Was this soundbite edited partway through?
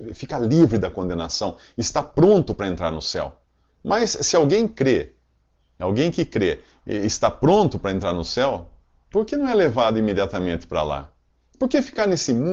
no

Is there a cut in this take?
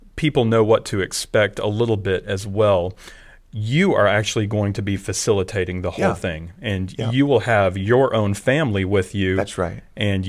no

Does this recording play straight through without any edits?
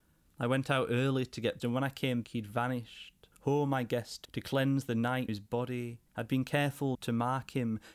no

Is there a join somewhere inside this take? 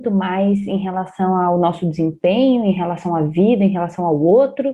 no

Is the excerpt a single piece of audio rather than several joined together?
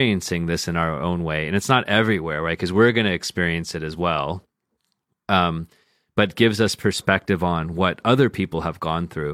yes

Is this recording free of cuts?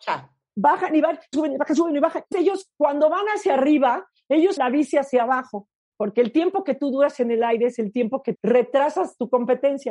no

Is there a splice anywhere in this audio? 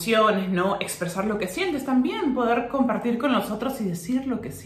no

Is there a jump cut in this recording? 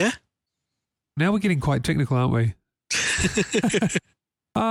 no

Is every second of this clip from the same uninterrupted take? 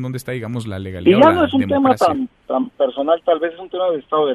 yes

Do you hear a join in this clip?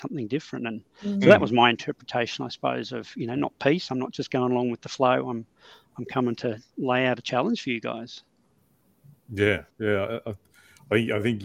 yes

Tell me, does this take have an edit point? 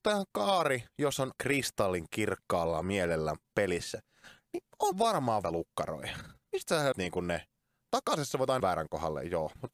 yes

